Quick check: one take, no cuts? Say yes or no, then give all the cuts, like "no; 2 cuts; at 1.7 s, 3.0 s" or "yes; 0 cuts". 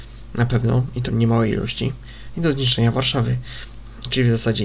no; 1 cut; at 1.1 s